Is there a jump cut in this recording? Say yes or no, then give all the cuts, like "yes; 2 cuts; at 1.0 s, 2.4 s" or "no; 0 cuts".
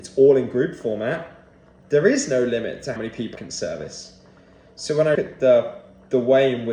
yes; 3 cuts; at 3.0 s, 3.4 s, 5.2 s